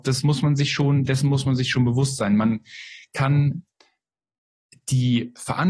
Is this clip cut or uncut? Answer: uncut